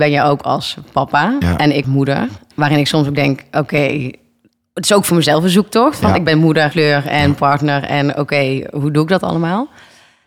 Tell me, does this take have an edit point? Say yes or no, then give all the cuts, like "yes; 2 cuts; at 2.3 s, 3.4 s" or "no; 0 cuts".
yes; 2 cuts; at 1.8 s, 6.7 s